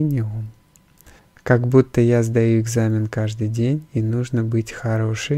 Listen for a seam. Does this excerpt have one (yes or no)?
yes